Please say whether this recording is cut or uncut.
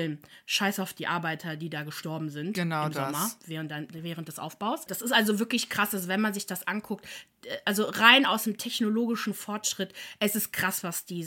uncut